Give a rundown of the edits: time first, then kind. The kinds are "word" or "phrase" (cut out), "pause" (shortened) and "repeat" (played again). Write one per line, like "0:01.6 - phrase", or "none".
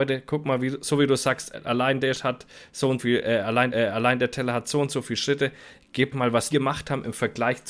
0:01.5 - word
0:02.1 - word
0:03.0 - word
0:03.7 - repeat
0:06.1 - word
0:06.5 - word

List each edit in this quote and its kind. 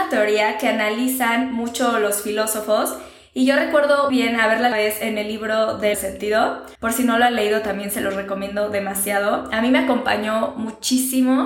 0:04.1 - word
0:04.7 - phrase
0:05.9 - phrase
0:06.7 - pause

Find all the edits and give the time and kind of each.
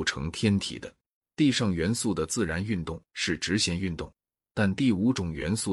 0:01.2 - pause

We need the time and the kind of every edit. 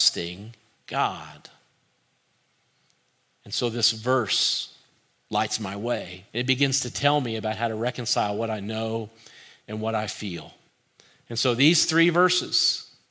0:06.3 - pause

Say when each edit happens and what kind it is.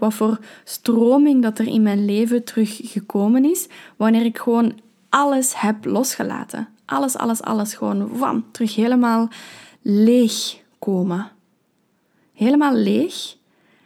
none

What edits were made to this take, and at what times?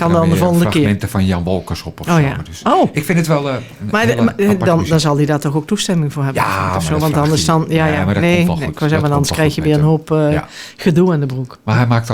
none

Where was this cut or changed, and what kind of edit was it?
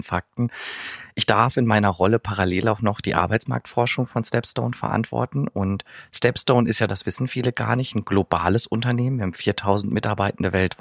none

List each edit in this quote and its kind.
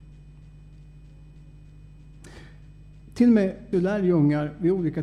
0:03.7 - word

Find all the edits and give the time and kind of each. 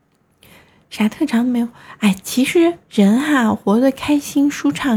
0:02.8 - pause

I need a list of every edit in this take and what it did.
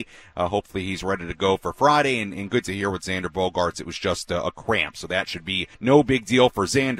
0:05.7 - pause

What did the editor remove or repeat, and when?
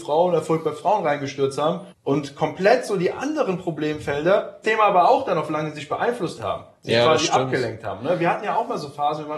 0:01.9 - pause
0:04.6 - phrase
0:06.4 - phrase

